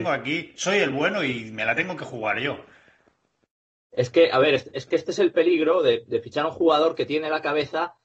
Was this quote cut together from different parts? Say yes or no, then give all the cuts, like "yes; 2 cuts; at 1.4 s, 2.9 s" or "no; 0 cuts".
no; 0 cuts